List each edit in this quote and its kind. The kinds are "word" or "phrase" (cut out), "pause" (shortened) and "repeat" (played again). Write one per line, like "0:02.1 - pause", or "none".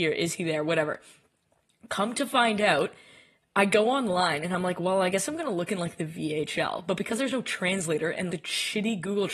0:08.3 - word